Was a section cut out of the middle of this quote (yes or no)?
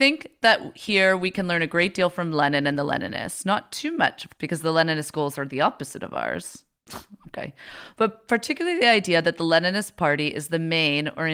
yes